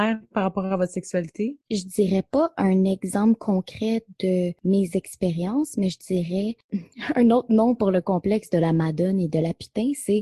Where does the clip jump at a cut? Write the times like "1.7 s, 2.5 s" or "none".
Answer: 1.6 s